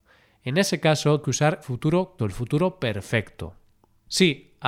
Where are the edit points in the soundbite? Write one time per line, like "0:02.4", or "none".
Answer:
0:01.2
0:01.6
0:02.2